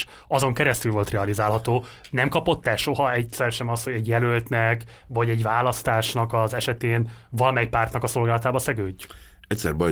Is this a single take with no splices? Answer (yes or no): yes